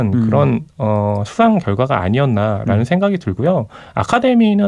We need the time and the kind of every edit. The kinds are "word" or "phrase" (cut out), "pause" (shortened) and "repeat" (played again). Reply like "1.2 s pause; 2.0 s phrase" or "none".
none